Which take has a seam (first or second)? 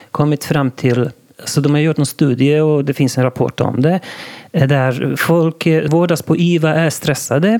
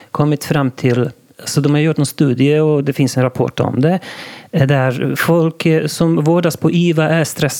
first